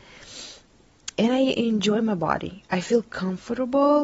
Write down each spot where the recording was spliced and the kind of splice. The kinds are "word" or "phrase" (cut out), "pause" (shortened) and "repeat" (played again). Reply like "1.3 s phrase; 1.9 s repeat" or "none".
1.1 s word